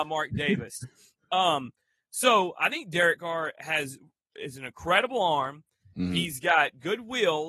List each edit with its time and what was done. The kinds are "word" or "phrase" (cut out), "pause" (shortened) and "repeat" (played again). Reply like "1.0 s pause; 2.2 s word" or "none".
none

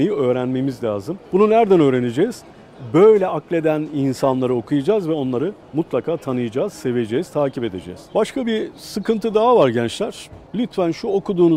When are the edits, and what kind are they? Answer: 1.2 s pause; 5.6 s pause; 10.5 s pause

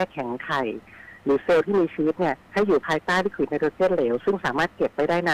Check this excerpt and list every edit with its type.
2.4 s pause

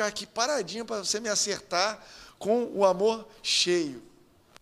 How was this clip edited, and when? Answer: none

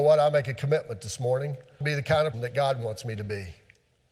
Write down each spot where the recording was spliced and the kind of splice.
1.8 s phrase; 2.3 s word

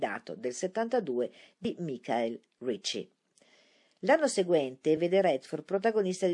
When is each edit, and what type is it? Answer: none

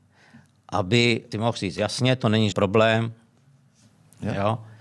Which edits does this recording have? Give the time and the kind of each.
1.3 s word; 2.5 s word

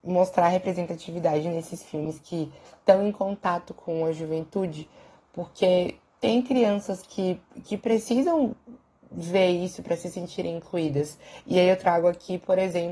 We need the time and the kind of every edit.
none

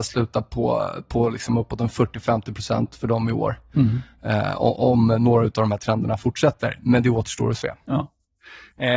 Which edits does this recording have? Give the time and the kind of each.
none

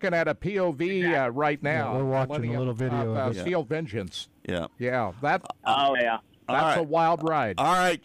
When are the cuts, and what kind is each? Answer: 5.9 s word

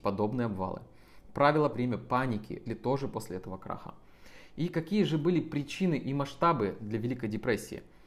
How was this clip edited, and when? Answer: 1.7 s phrase; 2.7 s word

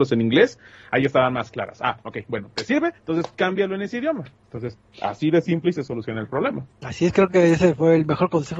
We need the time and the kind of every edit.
3.0 s pause; 4.3 s pause; 6.7 s pause

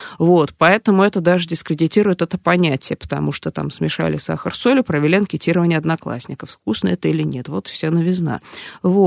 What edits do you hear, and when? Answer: none

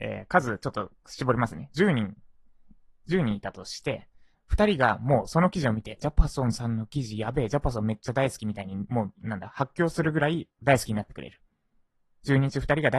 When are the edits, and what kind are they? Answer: 4.3 s word; 6.0 s word

